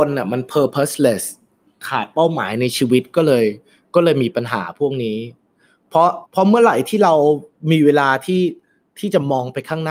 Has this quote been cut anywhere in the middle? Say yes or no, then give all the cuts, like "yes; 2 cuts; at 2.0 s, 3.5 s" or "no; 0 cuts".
yes; 1 cut; at 6.3 s